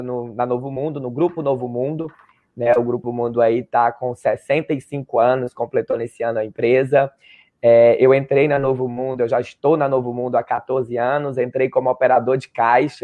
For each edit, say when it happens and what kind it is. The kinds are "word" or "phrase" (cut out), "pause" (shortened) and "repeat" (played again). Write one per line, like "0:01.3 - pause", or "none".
0:03.0 - word